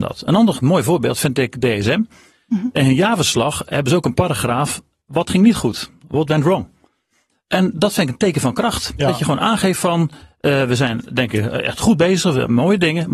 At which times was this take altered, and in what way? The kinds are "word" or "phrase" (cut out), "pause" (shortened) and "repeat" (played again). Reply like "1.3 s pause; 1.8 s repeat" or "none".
none